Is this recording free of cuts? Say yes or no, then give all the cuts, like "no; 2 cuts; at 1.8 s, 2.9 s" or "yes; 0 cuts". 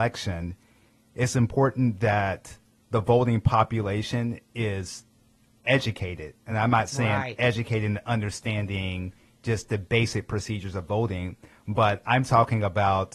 yes; 0 cuts